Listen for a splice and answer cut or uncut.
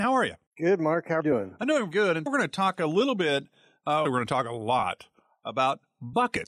cut